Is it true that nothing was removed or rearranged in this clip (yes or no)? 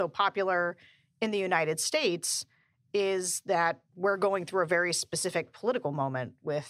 yes